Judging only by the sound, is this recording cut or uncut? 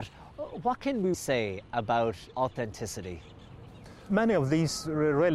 cut